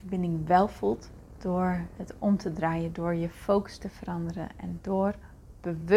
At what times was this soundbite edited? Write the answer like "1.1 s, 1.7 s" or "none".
none